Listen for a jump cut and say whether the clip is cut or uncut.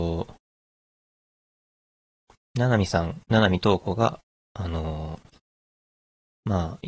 uncut